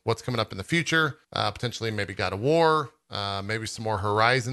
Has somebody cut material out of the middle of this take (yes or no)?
yes